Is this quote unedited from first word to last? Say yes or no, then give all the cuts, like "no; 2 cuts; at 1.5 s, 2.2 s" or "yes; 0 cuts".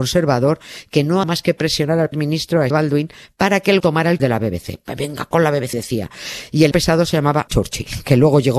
no; 9 cuts; at 1.2 s, 2.1 s, 2.7 s, 3.8 s, 4.2 s, 5.3 s, 5.7 s, 6.7 s, 7.5 s